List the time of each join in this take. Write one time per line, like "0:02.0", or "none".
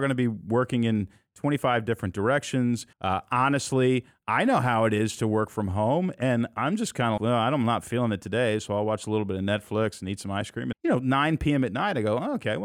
0:02.9
0:07.2
0:10.7